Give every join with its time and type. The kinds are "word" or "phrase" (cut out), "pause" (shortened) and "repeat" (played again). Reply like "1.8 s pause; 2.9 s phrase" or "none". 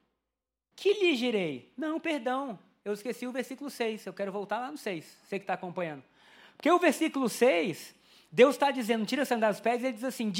none